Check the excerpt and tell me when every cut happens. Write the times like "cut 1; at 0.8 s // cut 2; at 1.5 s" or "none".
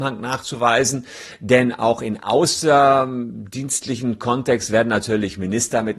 none